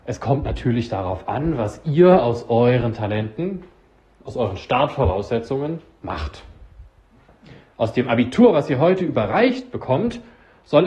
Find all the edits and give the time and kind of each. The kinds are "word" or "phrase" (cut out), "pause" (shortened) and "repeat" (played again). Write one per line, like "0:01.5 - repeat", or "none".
none